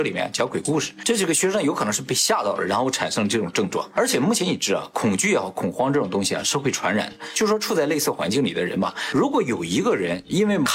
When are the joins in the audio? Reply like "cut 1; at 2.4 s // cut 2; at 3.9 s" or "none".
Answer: none